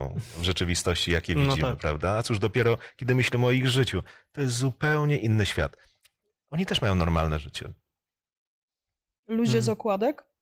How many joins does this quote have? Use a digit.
0